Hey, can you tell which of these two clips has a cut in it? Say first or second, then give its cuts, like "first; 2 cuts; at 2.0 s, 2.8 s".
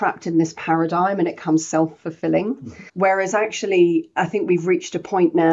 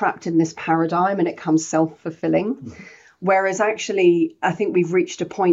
first; 1 cut; at 2.9 s